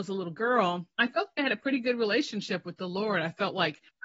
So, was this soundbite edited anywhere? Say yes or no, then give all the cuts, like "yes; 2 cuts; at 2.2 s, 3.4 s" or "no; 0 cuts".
no; 0 cuts